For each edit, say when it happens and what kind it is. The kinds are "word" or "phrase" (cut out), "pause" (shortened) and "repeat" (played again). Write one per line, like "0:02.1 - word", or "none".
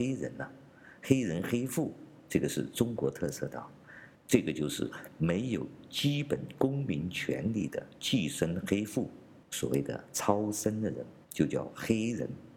0:04.2 - pause
0:09.4 - pause
0:11.2 - pause

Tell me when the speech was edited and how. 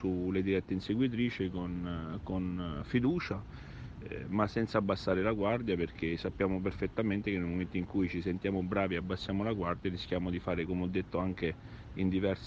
none

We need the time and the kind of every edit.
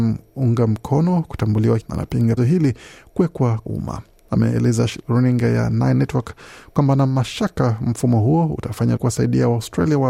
0:01.8 - word
0:02.4 - word
0:03.6 - word
0:09.0 - word

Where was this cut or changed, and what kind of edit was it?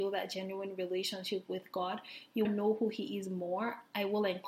0:02.4 - phrase

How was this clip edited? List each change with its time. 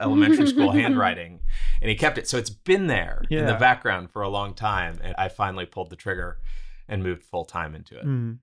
0:05.1 - word

